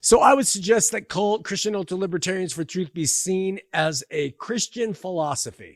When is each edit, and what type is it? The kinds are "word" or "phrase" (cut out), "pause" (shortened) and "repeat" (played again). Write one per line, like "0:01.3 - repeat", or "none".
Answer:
none